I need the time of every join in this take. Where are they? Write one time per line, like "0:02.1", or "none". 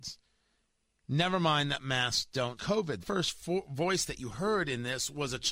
0:02.6
0:03.0

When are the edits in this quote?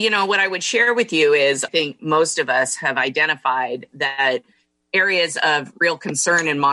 0:01.7

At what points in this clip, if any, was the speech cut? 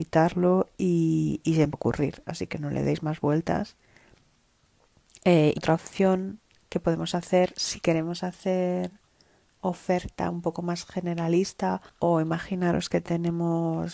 0:01.7
0:05.6
0:11.9

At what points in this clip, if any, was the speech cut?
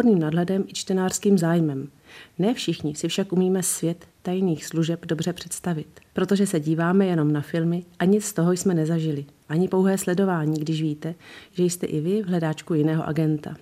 none

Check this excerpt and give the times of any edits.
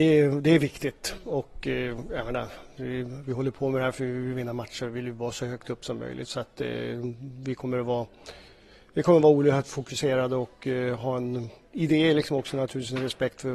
none

